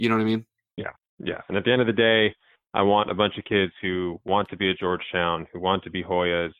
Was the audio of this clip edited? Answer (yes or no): no